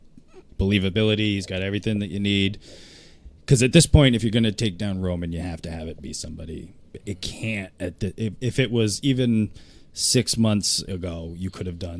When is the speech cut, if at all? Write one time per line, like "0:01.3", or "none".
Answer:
none